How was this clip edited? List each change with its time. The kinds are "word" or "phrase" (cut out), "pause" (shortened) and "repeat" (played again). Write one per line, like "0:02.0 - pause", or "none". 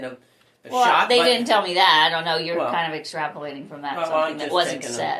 none